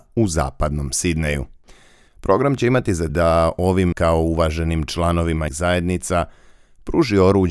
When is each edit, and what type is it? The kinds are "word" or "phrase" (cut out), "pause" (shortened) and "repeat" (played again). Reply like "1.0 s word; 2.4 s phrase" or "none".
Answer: 3.1 s word; 3.9 s word; 5.5 s word